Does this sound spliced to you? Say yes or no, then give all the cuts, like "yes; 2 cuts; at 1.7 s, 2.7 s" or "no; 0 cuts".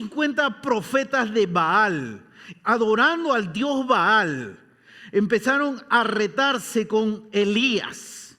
no; 0 cuts